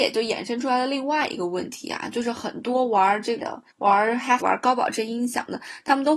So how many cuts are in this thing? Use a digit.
3